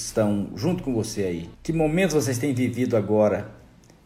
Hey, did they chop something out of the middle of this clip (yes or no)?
yes